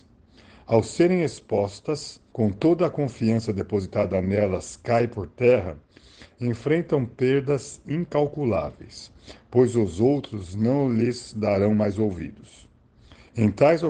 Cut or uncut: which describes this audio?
cut